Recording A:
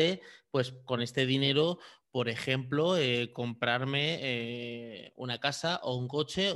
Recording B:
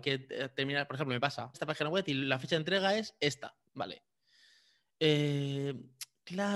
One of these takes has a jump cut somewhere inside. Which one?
B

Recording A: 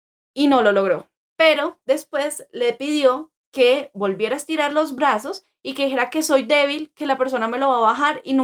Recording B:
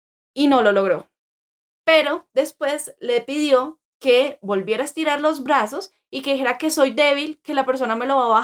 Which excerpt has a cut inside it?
A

